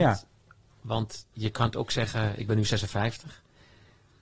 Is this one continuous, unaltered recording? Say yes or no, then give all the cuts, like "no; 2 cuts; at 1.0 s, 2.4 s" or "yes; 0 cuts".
no; 1 cut; at 1.3 s